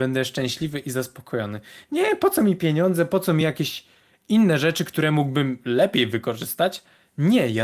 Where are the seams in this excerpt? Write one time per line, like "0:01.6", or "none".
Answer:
none